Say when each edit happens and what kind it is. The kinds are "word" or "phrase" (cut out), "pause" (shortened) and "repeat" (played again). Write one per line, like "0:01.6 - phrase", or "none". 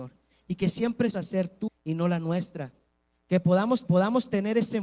0:01.1 - phrase
0:01.7 - word
0:03.9 - repeat